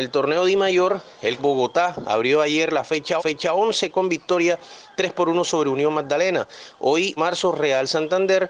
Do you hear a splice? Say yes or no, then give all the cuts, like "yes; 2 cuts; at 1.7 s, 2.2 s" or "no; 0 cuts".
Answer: yes; 3 cuts; at 1.4 s, 3.2 s, 7.2 s